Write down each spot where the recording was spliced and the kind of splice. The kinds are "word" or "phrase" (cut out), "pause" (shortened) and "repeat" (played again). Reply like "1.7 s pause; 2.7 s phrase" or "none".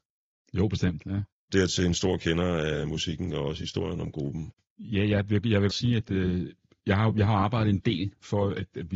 5.7 s word